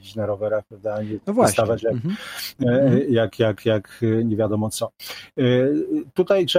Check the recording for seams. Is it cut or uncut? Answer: uncut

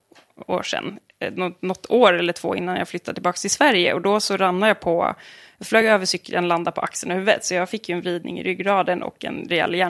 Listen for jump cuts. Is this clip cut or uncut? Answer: uncut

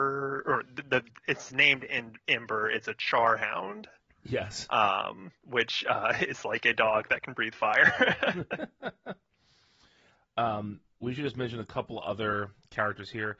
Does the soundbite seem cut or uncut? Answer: uncut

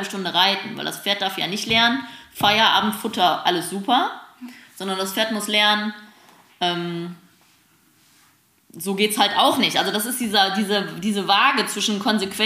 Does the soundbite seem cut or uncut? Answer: uncut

